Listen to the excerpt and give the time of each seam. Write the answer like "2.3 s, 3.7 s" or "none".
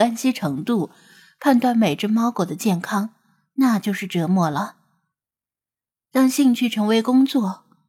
none